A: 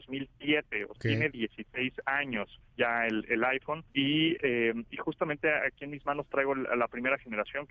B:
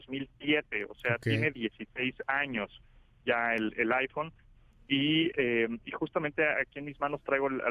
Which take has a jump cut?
A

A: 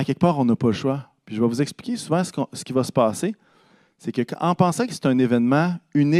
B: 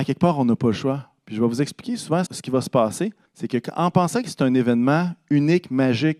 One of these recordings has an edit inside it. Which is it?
B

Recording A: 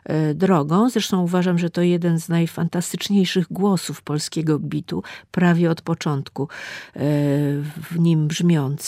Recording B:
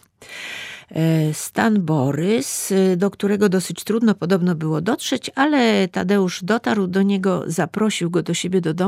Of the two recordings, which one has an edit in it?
A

